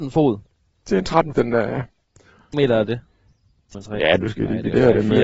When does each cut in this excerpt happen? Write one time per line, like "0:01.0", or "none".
0:01.3
0:02.5
0:03.7